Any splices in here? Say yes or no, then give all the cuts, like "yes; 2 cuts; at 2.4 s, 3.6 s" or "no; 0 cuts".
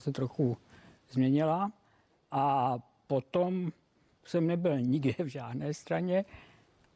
no; 0 cuts